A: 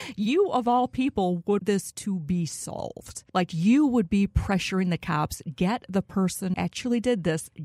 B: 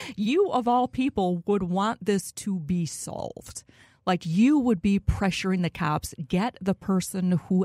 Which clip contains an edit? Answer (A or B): A